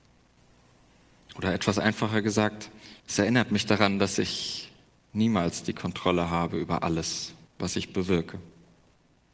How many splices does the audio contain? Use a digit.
3